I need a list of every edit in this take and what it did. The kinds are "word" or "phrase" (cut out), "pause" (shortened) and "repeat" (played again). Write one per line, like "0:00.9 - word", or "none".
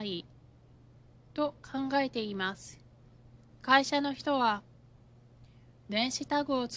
0:03.5 - pause